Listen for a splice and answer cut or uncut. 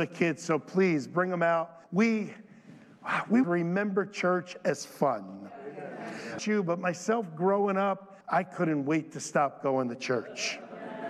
cut